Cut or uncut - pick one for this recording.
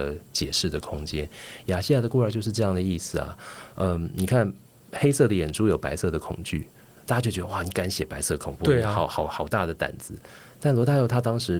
uncut